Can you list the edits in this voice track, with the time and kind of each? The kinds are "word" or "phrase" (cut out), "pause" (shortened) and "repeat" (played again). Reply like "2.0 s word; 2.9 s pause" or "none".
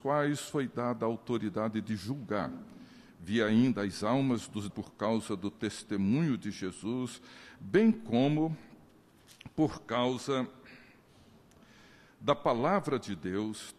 4.7 s word